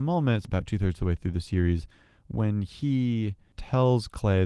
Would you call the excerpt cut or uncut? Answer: uncut